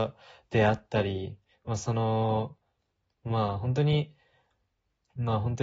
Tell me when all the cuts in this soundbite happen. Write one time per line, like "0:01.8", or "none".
none